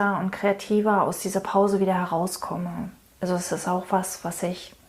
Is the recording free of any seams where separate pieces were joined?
yes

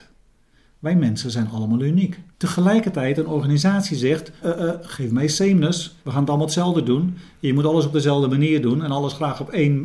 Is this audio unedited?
no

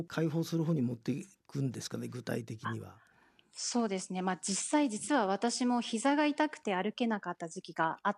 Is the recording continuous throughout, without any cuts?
yes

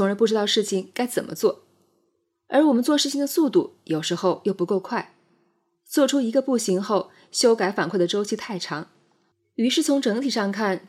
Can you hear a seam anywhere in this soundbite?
yes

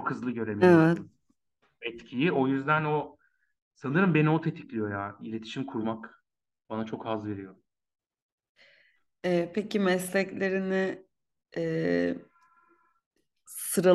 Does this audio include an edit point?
no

